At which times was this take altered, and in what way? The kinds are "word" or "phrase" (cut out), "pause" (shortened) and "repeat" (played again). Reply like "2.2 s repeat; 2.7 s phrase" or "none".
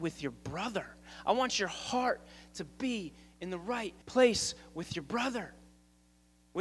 4.0 s pause